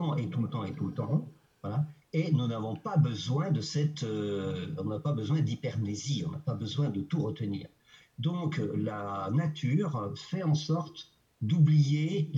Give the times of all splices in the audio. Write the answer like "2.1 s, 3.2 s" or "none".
none